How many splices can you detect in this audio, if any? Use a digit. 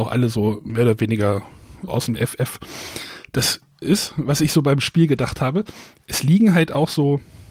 2